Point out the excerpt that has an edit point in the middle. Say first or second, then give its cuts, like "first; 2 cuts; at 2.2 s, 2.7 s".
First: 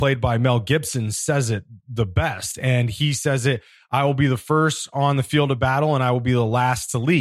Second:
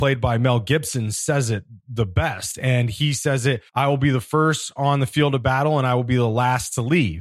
second; 1 cut; at 3.7 s